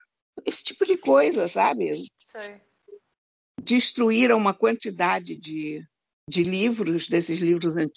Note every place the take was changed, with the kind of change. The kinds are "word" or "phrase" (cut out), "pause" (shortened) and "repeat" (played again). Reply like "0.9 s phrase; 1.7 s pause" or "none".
none

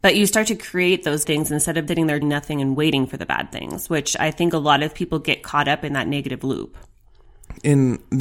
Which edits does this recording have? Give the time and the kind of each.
1.2 s word; 1.9 s word; 2.2 s word

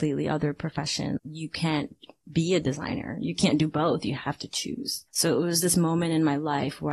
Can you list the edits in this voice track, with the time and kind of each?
1.2 s word; 5.1 s pause

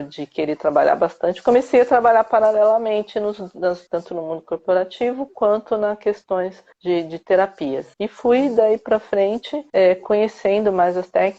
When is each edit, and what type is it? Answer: 3.9 s phrase; 6.7 s pause; 7.9 s pause; 9.7 s pause

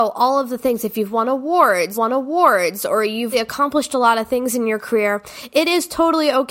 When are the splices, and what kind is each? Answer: 1.9 s repeat; 3.3 s word

